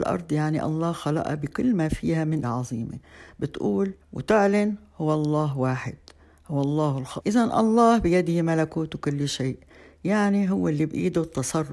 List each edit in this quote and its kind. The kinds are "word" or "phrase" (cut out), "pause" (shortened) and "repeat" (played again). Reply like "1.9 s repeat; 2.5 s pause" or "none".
2.4 s phrase; 4.0 s pause; 7.2 s phrase